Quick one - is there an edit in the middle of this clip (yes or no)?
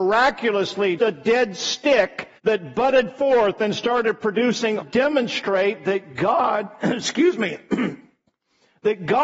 yes